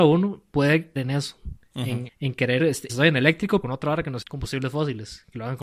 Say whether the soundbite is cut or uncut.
cut